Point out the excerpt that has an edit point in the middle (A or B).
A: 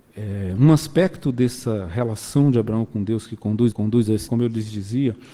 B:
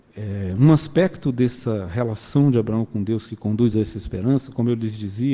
A